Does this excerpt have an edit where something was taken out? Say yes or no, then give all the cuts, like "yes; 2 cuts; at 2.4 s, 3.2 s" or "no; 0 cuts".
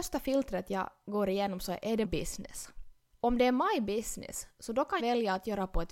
yes; 2 cuts; at 2.0 s, 5.0 s